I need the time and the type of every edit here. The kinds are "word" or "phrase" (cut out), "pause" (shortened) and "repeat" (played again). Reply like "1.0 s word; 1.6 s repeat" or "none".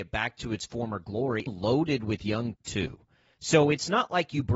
1.5 s phrase; 2.5 s word